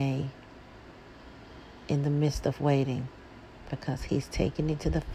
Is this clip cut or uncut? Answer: uncut